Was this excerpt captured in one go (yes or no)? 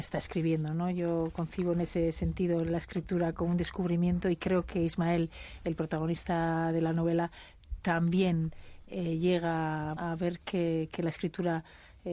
no